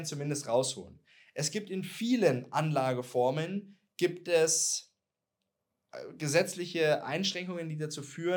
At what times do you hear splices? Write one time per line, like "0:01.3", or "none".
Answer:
none